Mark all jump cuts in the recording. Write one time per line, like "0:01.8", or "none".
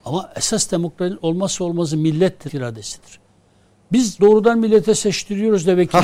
0:02.5
0:04.2